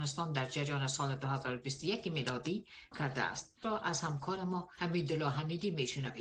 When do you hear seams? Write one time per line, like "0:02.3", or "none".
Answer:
0:02.9
0:03.6